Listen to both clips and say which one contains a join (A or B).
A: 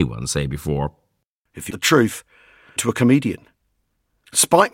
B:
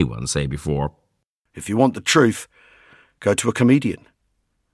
A